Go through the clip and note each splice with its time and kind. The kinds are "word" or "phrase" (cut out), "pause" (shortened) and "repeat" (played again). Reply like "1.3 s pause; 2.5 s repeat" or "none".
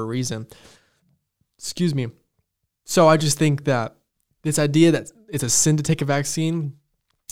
none